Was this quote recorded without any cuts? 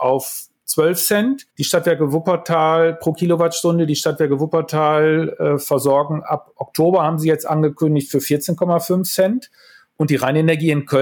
no; 1 cut; at 1.5 s

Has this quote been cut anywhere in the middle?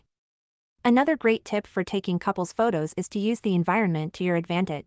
no; 0 cuts

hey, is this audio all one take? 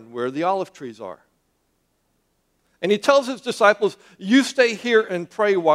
yes; 0 cuts

